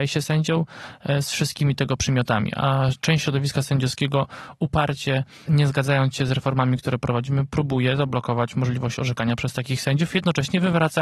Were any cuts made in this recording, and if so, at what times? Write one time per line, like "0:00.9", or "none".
0:05.5